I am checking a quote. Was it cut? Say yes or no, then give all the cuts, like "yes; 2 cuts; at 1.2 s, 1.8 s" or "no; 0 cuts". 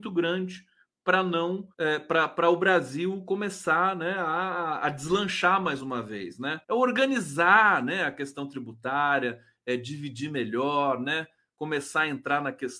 yes; 2 cuts; at 1.7 s, 6.6 s